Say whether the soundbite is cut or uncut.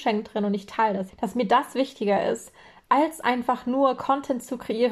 cut